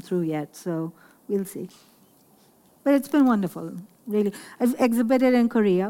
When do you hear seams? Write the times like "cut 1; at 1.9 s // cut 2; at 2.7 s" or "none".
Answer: none